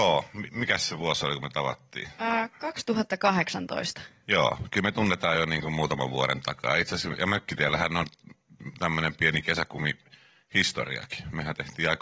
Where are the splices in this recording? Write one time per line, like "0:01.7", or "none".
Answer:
none